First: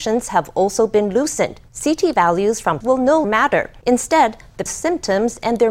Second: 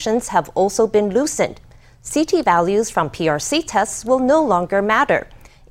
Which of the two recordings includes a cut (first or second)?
first